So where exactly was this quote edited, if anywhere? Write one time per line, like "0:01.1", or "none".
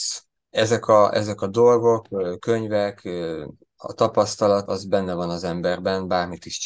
0:04.7